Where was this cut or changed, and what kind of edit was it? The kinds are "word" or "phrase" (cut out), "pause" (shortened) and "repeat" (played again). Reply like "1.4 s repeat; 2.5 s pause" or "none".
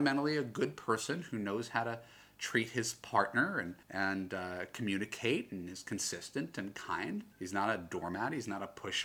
3.8 s pause; 7.3 s pause